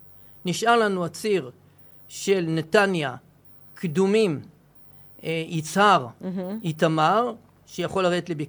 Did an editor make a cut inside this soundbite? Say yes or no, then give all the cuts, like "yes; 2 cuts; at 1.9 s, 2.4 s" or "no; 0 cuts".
no; 0 cuts